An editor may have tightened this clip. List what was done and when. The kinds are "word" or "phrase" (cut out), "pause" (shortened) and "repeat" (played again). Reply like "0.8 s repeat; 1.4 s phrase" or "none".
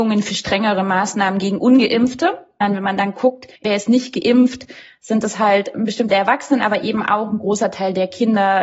3.6 s pause; 6.1 s word